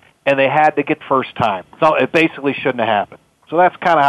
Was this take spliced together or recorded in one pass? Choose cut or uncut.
cut